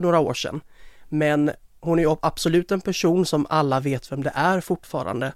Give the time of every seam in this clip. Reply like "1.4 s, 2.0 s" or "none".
none